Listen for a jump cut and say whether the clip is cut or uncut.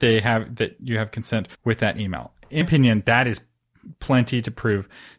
cut